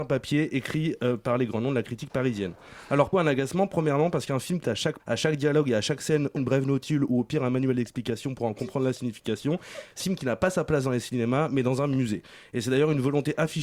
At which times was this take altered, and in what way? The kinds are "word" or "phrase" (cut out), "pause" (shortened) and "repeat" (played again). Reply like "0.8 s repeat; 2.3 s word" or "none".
3.1 s word; 4.6 s word; 5.0 s word; 6.4 s word; 10.0 s word